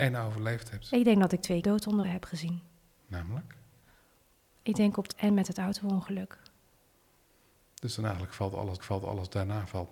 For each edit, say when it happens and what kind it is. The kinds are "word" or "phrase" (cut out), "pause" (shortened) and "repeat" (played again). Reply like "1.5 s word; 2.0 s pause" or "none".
1.6 s phrase; 2.0 s word; 5.1 s word; 8.8 s repeat